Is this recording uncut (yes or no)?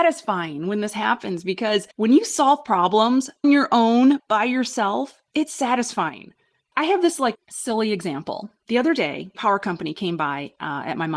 no